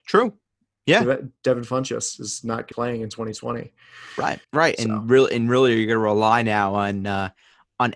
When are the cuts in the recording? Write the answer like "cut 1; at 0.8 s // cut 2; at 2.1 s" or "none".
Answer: cut 1; at 2.7 s // cut 2; at 4.4 s